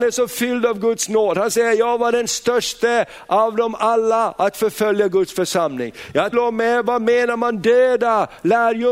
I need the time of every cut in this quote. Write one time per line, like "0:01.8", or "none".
0:06.3